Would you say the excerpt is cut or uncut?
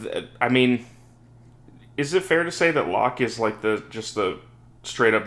uncut